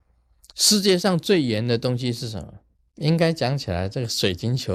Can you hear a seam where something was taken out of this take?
yes; 1 cut; at 2.8 s

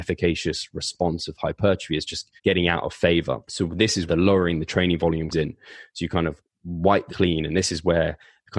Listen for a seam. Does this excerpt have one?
yes; 5 cuts; at 2.4 s, 3.4 s, 4.1 s, 5.3 s, 7.1 s

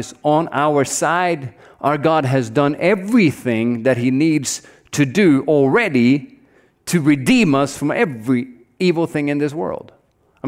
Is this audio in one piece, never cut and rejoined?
yes; 0 cuts

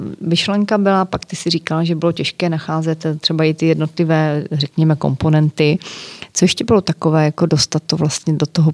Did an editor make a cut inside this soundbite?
no; 0 cuts

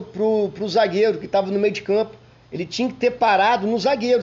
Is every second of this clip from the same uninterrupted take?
yes; 0 cuts

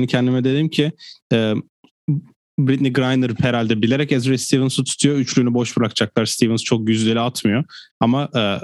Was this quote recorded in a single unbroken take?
yes; 0 cuts

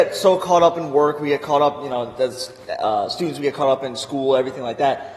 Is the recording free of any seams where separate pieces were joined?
yes; 0 cuts

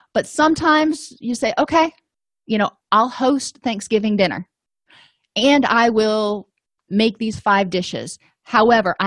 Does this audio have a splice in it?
no; 0 cuts

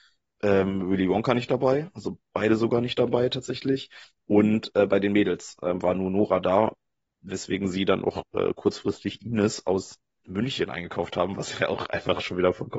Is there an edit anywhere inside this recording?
yes; 1 cut; at 10.2 s

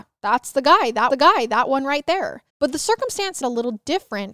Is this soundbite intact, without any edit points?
no; 3 cuts; at 1.1 s, 2.5 s, 3.4 s

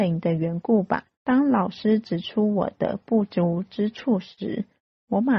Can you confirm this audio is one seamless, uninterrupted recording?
no; 1 cut; at 1.1 s

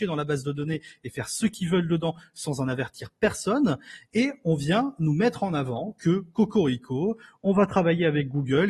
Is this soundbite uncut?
yes; 0 cuts

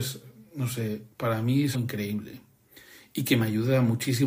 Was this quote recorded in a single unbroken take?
no; 2 cuts; at 1.1 s, 1.7 s

